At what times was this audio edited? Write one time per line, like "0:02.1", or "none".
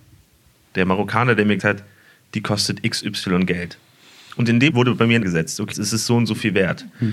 0:01.6
0:04.7
0:05.2
0:05.7